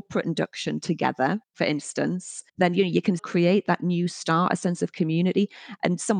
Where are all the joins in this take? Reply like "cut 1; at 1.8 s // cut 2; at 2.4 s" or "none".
cut 1; at 1.4 s // cut 2; at 2.5 s // cut 3; at 3.2 s